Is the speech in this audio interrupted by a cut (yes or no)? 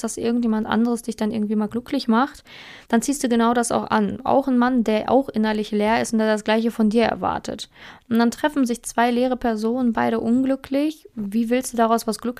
yes